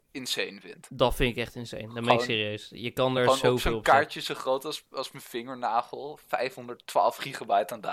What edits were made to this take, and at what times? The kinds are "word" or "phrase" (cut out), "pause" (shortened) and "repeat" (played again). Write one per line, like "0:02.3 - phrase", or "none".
none